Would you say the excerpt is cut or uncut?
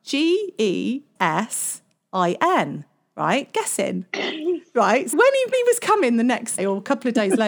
cut